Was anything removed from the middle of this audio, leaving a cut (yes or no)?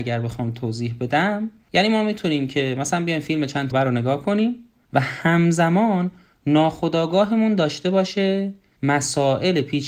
yes